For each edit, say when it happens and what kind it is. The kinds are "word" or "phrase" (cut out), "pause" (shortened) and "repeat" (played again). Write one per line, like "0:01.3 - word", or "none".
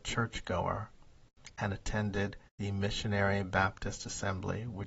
0:02.5 - pause